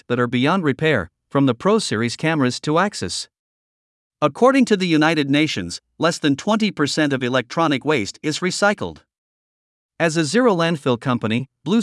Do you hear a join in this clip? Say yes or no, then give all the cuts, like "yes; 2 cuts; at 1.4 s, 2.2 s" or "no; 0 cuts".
no; 0 cuts